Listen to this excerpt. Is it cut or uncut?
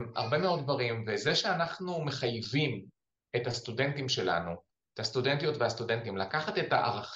uncut